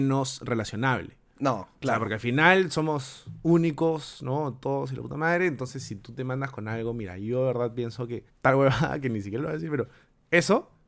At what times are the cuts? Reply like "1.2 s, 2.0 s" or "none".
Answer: 8.3 s

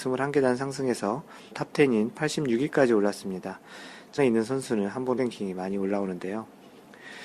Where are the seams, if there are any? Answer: 1.5 s, 4.2 s, 5.2 s

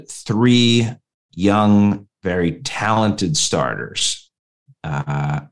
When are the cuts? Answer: none

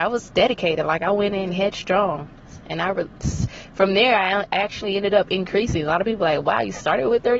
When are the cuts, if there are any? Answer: none

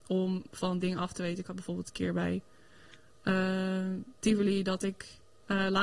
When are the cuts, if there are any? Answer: none

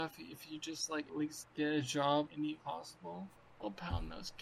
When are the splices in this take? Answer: 1.1 s, 1.4 s, 2.3 s, 2.6 s, 3.4 s

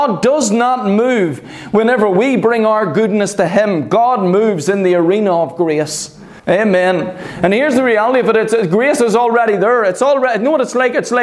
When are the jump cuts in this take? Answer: 6.4 s

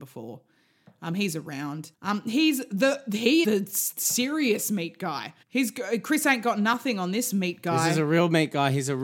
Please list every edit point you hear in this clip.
1.9 s, 3.4 s, 5.4 s

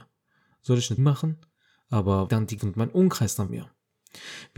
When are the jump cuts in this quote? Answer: 1.0 s, 2.3 s, 2.6 s, 3.5 s

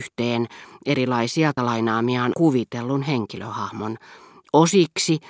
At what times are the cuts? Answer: 1.6 s, 2.3 s

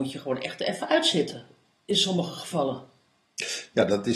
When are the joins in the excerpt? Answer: none

